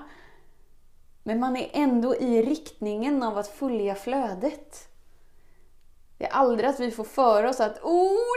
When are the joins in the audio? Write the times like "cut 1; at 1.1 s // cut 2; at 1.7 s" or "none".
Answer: none